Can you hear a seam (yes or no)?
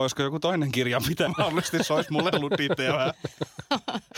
yes